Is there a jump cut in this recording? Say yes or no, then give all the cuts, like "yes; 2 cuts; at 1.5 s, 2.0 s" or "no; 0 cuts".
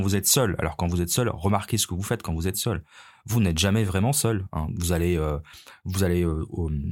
no; 0 cuts